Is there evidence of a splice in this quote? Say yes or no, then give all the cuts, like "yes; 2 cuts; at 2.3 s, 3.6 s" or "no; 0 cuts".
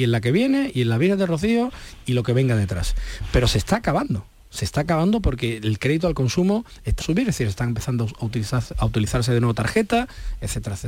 yes; 1 cut; at 7.0 s